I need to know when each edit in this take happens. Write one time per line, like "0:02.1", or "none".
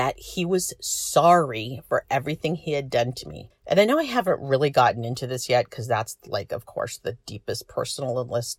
none

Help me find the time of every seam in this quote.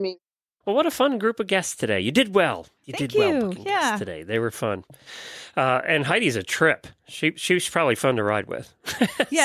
0:02.8

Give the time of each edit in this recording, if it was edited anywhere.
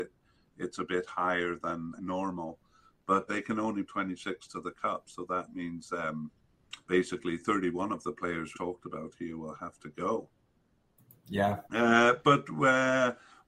0:02.0
0:03.3
0:03.9
0:06.8
0:08.5
0:11.6

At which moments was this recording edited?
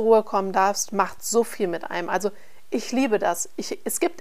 none

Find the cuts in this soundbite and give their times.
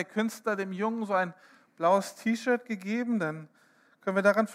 none

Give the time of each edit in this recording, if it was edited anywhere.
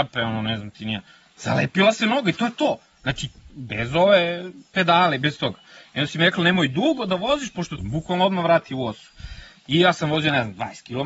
0:03.5
0:07.8

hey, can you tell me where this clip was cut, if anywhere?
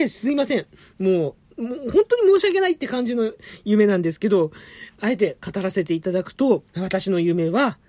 0:06.7

